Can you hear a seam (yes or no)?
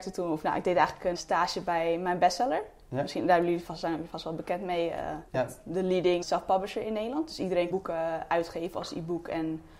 yes